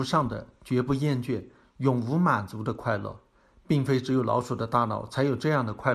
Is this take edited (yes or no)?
no